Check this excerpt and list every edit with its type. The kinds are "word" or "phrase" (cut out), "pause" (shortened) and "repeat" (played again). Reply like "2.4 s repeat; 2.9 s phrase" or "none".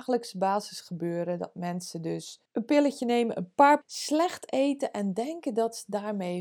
2.5 s pause; 3.8 s phrase